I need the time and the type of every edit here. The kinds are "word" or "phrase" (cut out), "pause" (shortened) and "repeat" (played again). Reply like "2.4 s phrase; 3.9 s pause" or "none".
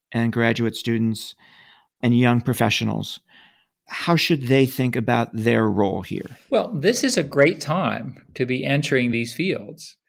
none